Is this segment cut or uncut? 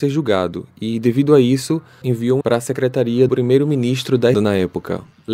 cut